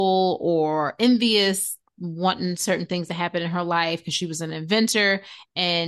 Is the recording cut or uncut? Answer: uncut